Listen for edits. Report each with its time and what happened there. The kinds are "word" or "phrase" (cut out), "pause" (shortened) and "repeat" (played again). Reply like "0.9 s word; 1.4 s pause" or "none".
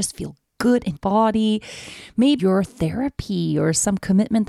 1.0 s word; 2.4 s phrase